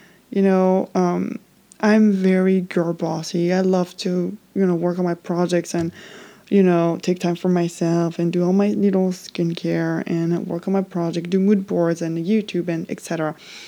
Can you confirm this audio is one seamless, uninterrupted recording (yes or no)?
yes